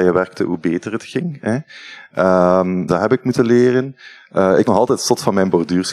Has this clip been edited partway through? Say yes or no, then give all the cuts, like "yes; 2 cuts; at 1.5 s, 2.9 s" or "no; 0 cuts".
yes; 2 cuts; at 2.9 s, 4.6 s